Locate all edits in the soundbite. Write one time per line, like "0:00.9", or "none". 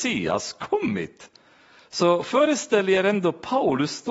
none